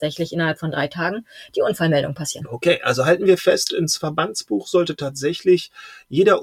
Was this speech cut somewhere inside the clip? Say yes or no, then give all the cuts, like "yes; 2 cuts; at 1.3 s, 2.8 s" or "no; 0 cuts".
no; 0 cuts